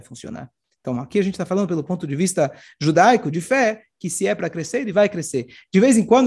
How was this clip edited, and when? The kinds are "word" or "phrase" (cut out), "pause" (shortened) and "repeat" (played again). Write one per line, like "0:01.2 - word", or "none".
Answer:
none